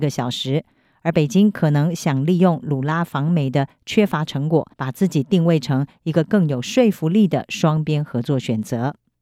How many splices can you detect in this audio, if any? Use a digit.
1